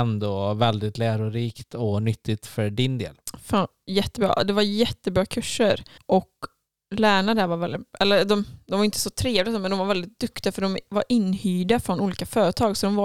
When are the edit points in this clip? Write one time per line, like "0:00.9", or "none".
0:06.0